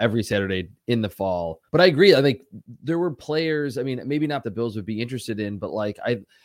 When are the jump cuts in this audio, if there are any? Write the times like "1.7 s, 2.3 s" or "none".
1.7 s, 4.4 s